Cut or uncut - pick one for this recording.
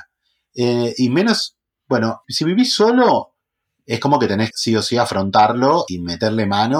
cut